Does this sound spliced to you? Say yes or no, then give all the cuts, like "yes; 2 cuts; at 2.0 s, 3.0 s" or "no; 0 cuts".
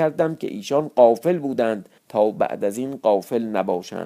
yes; 1 cut; at 2.0 s